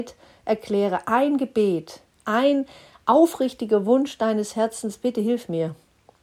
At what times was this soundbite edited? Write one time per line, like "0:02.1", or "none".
none